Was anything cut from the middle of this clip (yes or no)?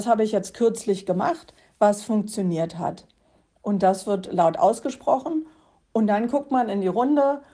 no